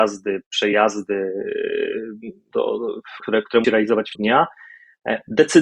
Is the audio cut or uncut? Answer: cut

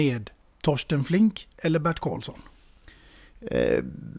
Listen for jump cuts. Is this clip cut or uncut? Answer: uncut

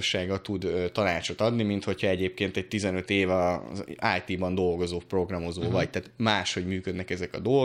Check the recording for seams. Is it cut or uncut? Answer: uncut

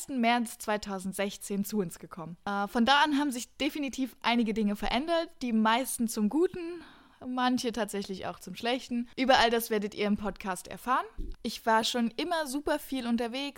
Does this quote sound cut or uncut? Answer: uncut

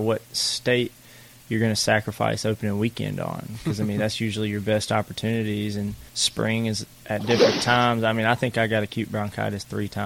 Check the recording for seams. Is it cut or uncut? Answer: cut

